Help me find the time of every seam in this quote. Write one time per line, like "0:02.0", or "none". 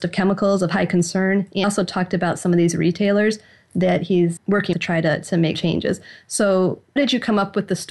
0:01.6
0:04.4
0:04.7
0:05.5
0:07.0